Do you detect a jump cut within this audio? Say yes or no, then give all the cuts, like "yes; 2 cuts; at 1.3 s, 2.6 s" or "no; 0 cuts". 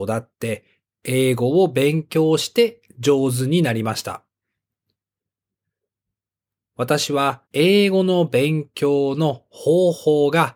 yes; 1 cut; at 7.5 s